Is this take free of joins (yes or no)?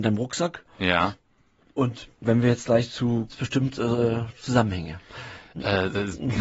no